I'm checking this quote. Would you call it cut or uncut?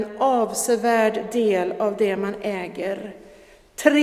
uncut